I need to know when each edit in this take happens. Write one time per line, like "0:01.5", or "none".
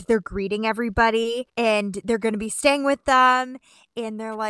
0:01.5